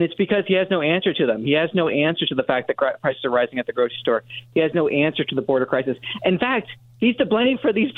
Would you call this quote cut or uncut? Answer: uncut